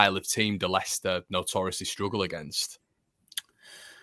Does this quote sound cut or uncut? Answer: uncut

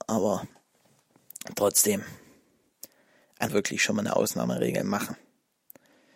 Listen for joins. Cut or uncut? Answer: cut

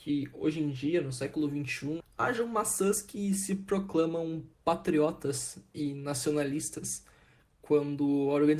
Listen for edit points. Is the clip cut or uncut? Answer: cut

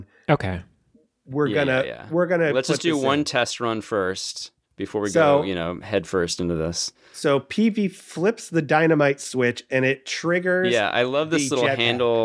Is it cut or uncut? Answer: uncut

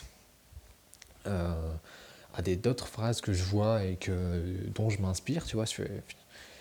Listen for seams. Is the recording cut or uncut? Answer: uncut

